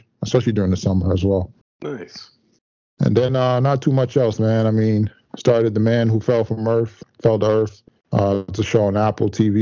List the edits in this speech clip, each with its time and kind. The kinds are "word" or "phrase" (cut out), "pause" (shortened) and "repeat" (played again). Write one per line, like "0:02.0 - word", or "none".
none